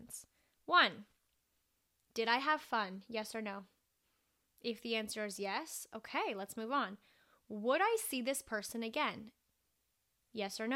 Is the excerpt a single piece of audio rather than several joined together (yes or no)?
yes